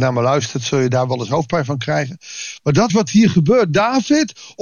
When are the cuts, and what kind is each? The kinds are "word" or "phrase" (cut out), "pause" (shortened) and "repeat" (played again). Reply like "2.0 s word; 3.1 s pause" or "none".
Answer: 2.9 s word